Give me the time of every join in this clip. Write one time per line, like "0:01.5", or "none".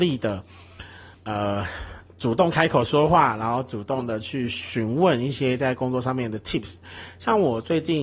0:01.1